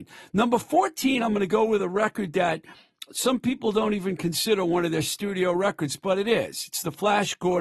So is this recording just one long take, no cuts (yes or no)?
yes